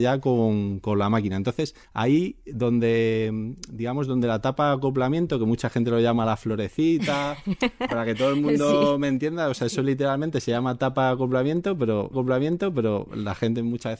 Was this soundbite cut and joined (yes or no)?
yes